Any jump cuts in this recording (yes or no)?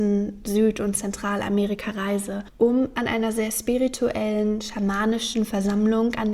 no